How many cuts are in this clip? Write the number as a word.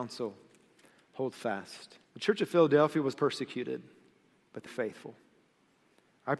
three